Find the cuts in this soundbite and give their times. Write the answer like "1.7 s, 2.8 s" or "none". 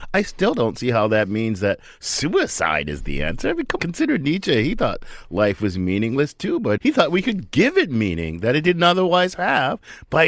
3.8 s, 6.8 s